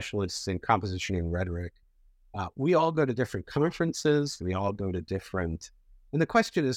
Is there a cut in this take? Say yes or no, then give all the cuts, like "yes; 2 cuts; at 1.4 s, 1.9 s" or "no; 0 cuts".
no; 0 cuts